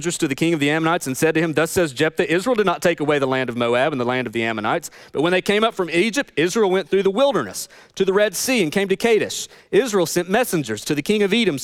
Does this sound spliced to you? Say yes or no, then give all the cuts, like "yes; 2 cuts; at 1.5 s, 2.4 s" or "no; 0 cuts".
no; 0 cuts